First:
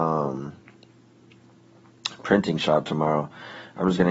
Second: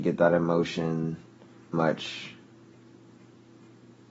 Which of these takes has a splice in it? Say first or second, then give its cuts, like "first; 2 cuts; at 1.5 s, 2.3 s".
second; 1 cut; at 1.7 s